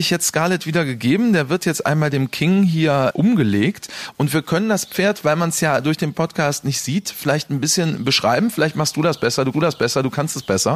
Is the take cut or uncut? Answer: cut